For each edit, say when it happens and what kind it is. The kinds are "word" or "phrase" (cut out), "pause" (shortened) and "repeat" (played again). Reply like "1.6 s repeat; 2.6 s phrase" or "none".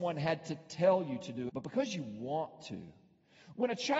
1.5 s word

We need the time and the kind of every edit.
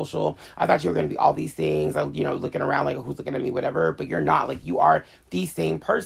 none

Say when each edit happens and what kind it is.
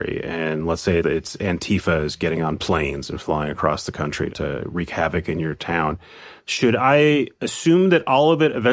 1.0 s word; 4.3 s word

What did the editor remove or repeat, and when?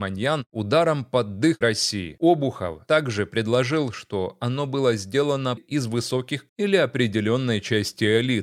1.6 s word; 5.6 s phrase; 6.5 s word

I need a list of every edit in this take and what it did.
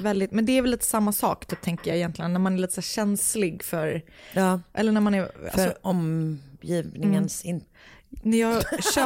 none

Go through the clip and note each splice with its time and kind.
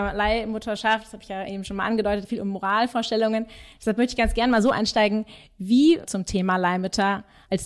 2.2 s phrase; 6.0 s phrase

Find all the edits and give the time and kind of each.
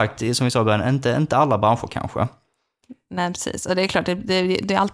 none

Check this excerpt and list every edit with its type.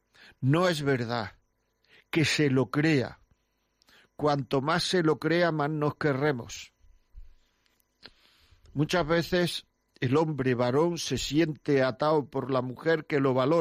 none

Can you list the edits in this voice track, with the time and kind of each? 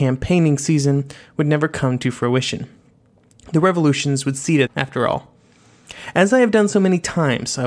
4.7 s word

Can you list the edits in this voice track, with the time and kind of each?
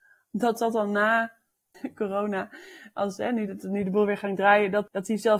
none

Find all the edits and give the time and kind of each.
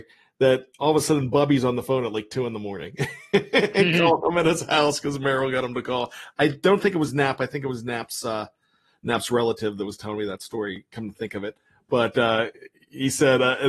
none

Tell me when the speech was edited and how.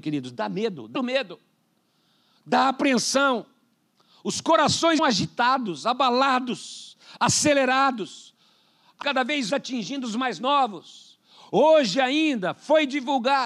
1.0 s word; 5.0 s word; 9.0 s word; 9.5 s word

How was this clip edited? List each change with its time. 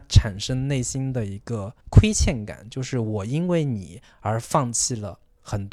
1.8 s pause

